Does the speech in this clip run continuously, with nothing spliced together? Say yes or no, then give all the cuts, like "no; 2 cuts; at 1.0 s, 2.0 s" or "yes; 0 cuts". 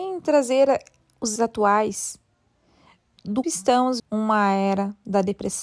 no; 3 cuts; at 1.4 s, 3.4 s, 4.0 s